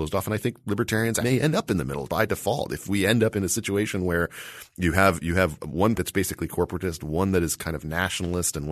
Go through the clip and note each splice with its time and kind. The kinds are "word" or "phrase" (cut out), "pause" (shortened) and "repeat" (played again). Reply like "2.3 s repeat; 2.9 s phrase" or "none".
1.2 s word; 2.1 s word; 6.0 s word